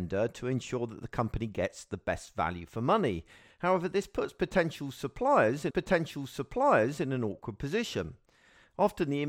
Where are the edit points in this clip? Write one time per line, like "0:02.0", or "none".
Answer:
0:05.7